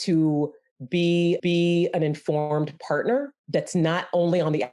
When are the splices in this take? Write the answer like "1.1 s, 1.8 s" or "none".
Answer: 1.4 s, 3.4 s

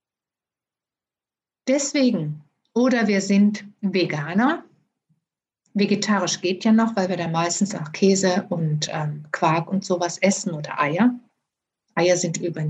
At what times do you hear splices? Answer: none

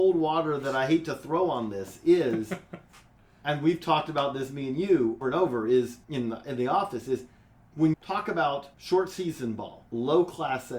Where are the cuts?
5.2 s, 6.0 s, 7.9 s, 8.7 s, 9.9 s

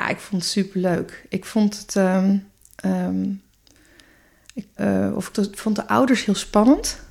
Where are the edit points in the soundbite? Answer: 4.8 s, 5.3 s

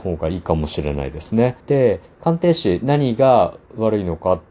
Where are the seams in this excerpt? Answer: 1.6 s

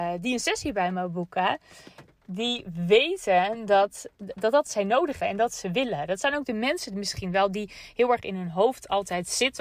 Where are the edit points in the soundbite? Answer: 4.1 s, 4.7 s, 5.2 s

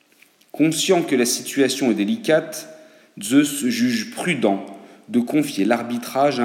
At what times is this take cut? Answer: none

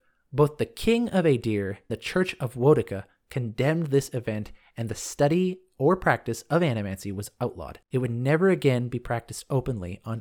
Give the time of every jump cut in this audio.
1.9 s, 7.8 s

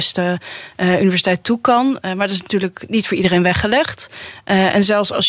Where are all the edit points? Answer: none

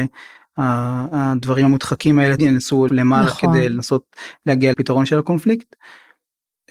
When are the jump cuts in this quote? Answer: 2.4 s, 2.9 s, 4.7 s

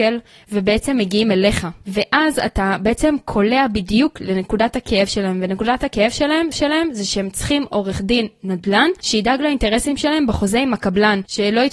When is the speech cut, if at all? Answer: 6.5 s

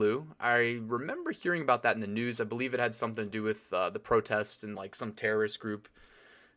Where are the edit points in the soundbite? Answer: none

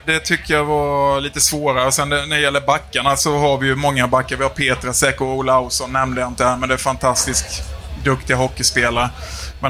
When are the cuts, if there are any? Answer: none

